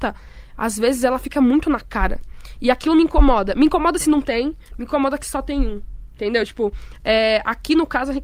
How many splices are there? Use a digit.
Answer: 0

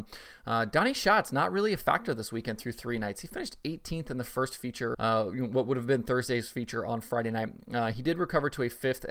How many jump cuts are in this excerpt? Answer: 1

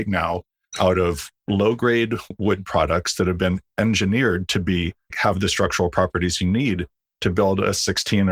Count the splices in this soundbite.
1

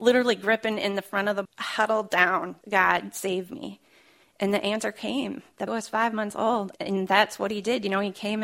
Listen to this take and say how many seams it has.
4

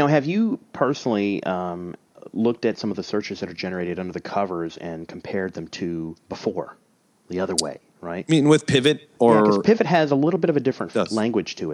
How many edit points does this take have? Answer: 1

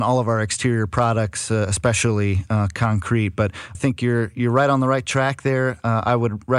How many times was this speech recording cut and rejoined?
1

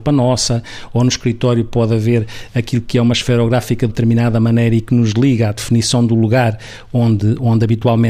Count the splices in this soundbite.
1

